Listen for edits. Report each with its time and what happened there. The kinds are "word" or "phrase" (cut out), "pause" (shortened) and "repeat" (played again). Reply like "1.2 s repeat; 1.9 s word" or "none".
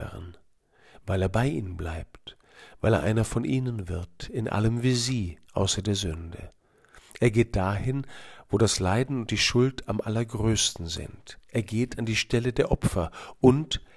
5.4 s pause; 11.4 s pause